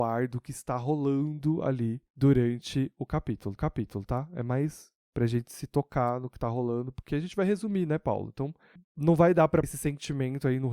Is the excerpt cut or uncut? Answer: cut